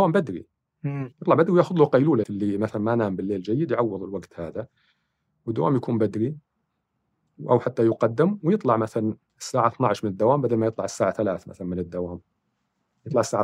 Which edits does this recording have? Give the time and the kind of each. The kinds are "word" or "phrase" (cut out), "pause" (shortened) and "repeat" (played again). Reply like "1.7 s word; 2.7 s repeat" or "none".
1.1 s pause; 2.2 s phrase